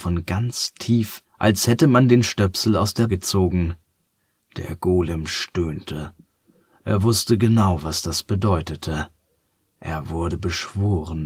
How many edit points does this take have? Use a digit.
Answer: 2